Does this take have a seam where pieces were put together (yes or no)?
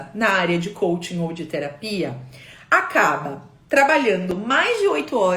no